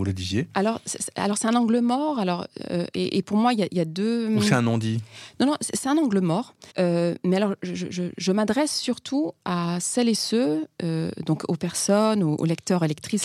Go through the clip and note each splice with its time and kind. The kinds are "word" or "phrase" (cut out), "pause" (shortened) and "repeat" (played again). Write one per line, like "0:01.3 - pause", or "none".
0:06.7 - pause

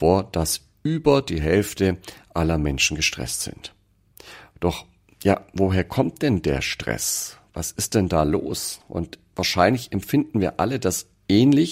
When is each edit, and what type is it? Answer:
none

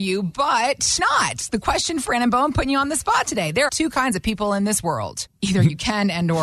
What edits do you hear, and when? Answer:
0:01.0 - word
0:02.1 - word
0:03.7 - word

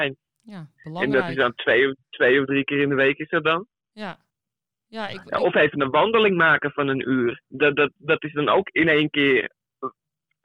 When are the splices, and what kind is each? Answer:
0:02.0 - pause
0:04.3 - pause
0:07.4 - pause

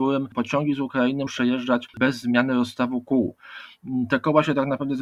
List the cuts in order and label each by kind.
0:01.3 - word
0:01.9 - word

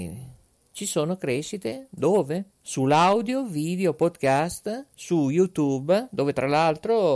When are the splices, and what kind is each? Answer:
0:02.5 - pause
0:04.9 - pause

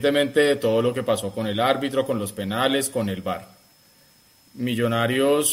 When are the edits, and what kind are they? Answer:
none

